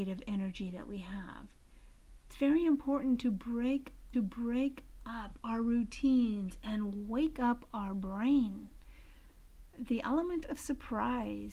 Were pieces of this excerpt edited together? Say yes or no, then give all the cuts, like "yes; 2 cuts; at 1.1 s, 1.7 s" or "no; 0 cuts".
yes; 1 cut; at 4.1 s